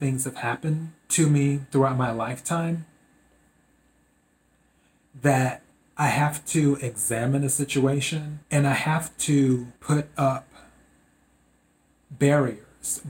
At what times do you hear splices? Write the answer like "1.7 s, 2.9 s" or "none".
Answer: 1.0 s, 5.7 s, 8.4 s, 9.8 s